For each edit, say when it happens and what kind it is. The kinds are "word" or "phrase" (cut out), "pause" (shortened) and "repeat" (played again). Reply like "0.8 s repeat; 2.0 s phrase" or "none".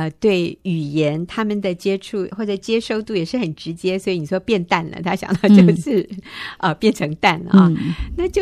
2.3 s word